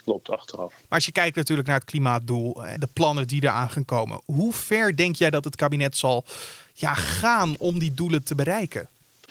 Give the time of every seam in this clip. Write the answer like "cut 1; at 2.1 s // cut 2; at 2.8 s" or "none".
cut 1; at 2.8 s